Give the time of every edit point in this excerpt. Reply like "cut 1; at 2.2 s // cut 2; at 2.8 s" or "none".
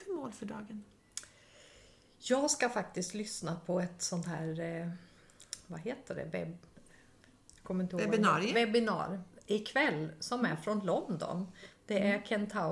none